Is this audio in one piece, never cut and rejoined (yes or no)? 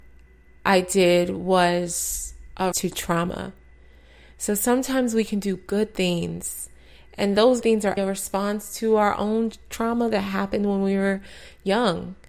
no